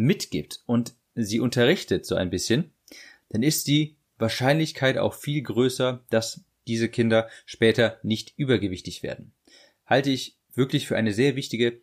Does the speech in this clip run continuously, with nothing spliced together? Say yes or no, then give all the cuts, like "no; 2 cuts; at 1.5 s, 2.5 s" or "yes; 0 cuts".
yes; 0 cuts